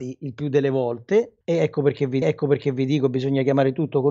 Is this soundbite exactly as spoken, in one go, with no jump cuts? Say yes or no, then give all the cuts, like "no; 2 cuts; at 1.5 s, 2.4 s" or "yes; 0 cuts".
no; 2 cuts; at 1.4 s, 2.2 s